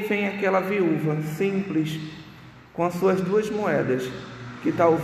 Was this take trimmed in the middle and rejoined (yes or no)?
no